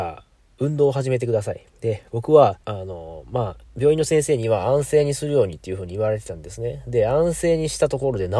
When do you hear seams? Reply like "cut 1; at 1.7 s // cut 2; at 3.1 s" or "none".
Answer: cut 1; at 1.7 s // cut 2; at 2.6 s